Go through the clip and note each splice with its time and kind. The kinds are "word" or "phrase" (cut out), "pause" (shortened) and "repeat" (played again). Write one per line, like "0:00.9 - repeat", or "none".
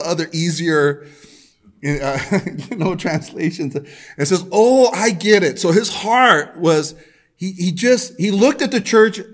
none